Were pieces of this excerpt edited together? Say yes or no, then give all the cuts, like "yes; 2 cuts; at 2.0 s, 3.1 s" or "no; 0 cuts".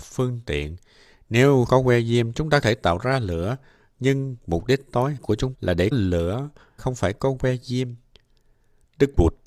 yes; 6 cuts; at 1.7 s, 2.6 s, 5.2 s, 5.5 s, 5.9 s, 6.8 s